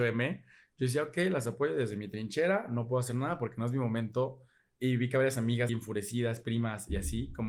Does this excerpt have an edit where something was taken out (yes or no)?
yes